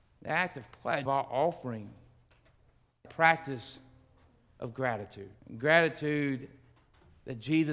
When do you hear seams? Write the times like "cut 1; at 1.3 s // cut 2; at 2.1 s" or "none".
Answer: cut 1; at 1.1 s // cut 2; at 3.1 s // cut 3; at 5.4 s